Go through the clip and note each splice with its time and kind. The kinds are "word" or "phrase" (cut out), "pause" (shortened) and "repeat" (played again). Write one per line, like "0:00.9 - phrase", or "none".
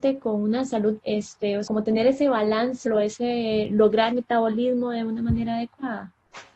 0:01.0 - word
0:01.7 - word
0:02.9 - word
0:04.1 - word